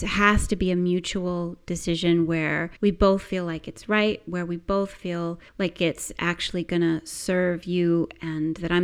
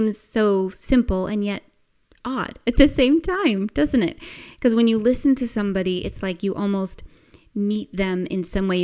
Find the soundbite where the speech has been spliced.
first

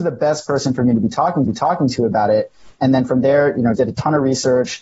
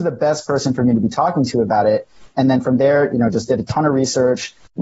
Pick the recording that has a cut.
first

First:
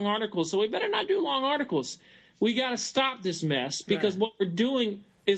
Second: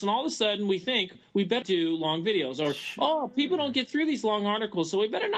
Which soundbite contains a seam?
second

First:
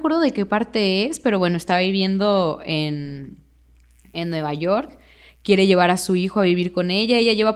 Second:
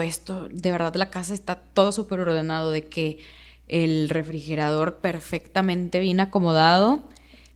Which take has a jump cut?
second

